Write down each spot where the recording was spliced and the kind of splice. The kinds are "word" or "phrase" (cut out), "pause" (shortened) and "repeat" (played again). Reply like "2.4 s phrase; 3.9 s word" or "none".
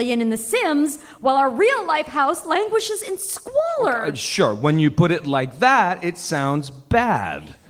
none